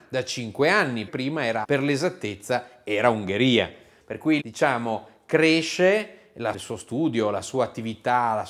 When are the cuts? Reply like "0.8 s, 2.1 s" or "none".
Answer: 1.1 s, 1.6 s, 4.4 s, 6.5 s